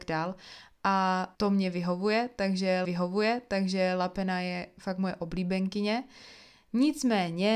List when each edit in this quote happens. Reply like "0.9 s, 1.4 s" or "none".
1.3 s, 2.8 s